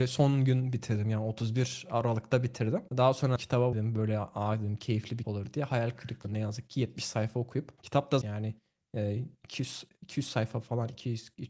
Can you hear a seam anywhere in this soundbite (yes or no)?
yes